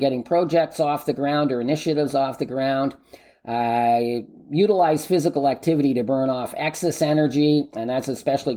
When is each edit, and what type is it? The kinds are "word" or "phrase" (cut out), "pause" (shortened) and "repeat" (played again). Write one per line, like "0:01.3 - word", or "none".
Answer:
none